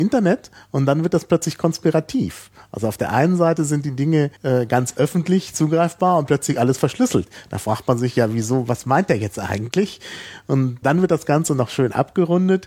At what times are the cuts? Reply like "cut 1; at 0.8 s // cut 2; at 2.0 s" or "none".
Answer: cut 1; at 4.4 s // cut 2; at 10.8 s